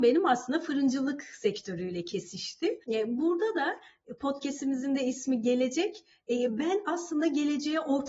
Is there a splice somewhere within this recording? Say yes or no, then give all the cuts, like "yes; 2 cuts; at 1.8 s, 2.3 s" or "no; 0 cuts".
yes; 1 cut; at 2.8 s